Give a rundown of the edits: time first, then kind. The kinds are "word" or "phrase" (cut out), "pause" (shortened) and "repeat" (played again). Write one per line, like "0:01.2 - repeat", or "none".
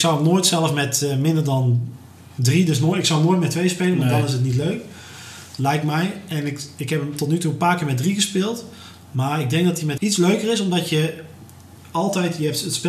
0:10.0 - word

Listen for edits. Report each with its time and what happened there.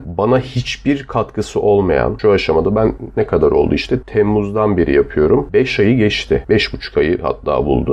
none

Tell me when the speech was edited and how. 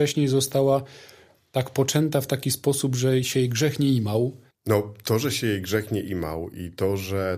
none

